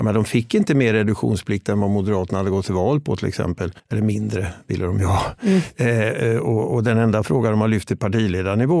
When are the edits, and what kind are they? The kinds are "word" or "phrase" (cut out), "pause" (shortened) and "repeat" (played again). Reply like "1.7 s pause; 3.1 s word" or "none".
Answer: 3.8 s pause

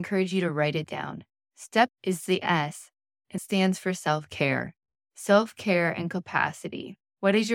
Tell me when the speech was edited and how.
1.9 s word; 3.4 s word

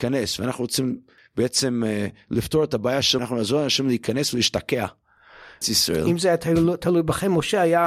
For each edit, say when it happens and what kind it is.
3.2 s word; 5.6 s word

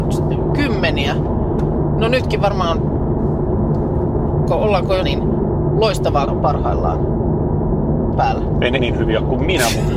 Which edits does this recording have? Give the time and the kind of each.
2.4 s word; 4.5 s word; 5.0 s word; 6.3 s word; 8.1 s word; 8.8 s word

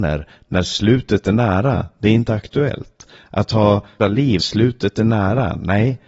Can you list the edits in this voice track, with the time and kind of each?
4.0 s word; 4.4 s word

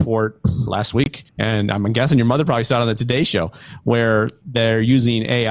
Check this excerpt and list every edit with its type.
1.3 s pause

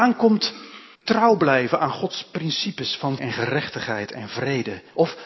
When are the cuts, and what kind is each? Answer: 0.9 s pause; 3.2 s word

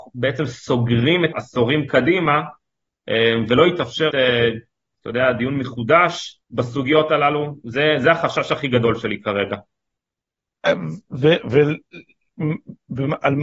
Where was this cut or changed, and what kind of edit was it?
1.3 s phrase; 4.1 s word; 6.4 s pause

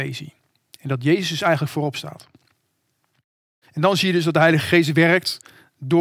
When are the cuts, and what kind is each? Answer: none

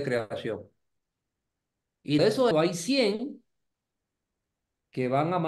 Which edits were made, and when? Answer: 2.2 s word; 2.5 s word

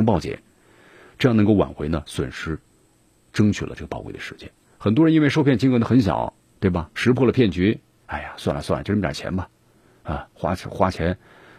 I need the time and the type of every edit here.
none

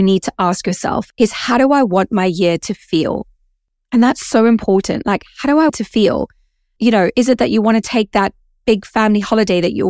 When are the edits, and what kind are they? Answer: 1.1 s phrase; 5.7 s word

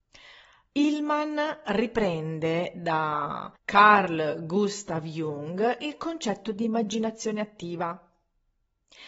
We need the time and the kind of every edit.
3.6 s pause

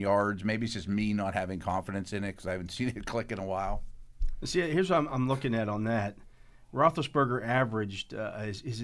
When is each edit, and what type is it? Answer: none

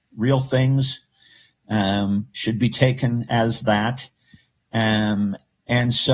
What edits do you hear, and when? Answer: none

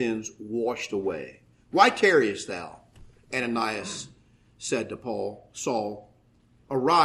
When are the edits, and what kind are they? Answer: none

